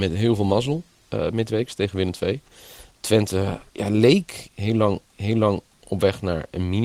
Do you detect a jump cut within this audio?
yes; 2 cuts; at 3.7 s, 5.1 s

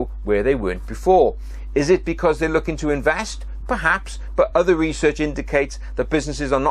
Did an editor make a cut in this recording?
no; 0 cuts

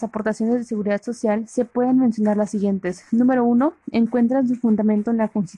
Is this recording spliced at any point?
no; 0 cuts

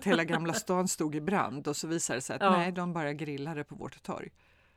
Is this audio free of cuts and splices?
yes; 0 cuts

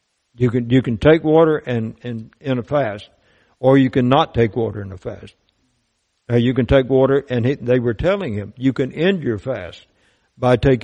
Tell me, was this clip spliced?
no; 0 cuts

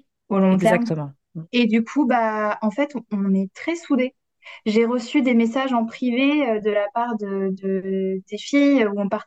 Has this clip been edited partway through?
yes; 1 cut; at 1.5 s

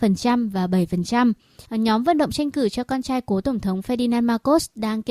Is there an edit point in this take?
yes; 1 cut; at 1.7 s

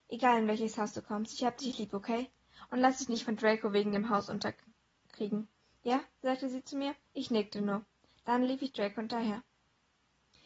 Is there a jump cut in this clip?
yes; 2 cuts; at 6.1 s, 7.1 s

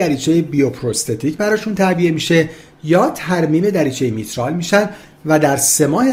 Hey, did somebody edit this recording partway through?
no; 0 cuts

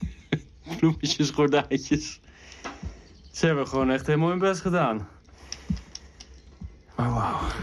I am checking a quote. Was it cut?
no; 0 cuts

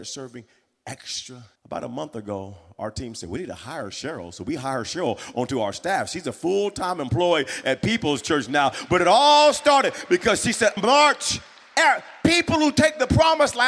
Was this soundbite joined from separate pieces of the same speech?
yes; 2 cuts; at 1.6 s, 10.8 s

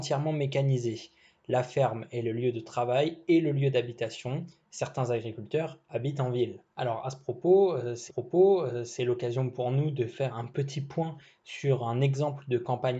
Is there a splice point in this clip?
yes; 3 cuts; at 6.7 s, 8.1 s, 10.3 s

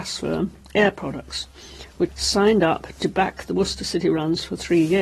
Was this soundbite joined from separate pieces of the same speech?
yes; 1 cut; at 2.1 s

